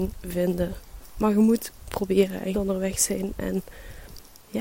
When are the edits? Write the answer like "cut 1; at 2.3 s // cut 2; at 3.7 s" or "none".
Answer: cut 1; at 2.5 s

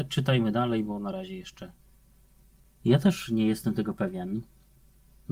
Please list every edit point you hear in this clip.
none

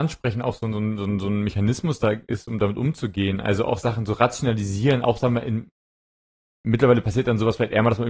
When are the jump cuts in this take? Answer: none

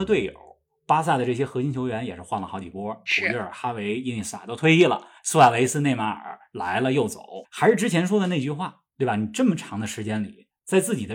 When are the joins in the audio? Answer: cut 1; at 5.2 s // cut 2; at 7.4 s

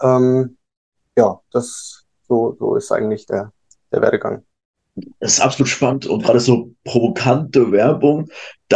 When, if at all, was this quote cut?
none

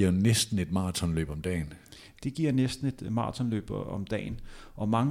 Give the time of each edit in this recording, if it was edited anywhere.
none

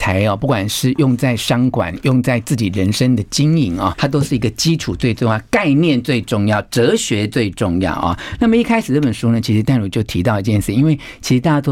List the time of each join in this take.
cut 1; at 3.9 s

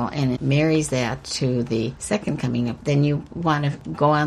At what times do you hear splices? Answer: cut 1; at 2.8 s

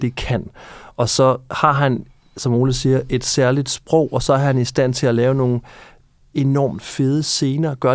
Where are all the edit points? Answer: none

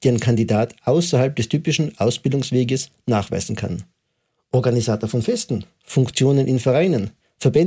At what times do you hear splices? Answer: none

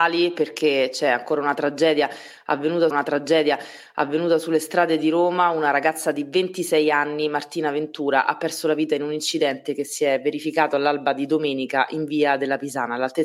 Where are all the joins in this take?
cut 1; at 2.9 s

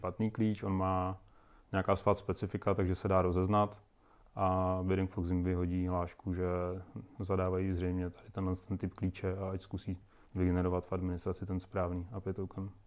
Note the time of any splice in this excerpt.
none

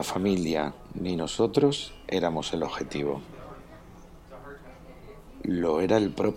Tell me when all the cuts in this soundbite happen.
none

